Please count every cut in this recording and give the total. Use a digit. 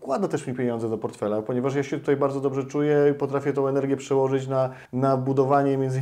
1